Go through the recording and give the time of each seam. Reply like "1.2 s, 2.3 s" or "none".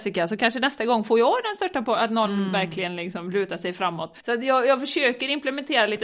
4.2 s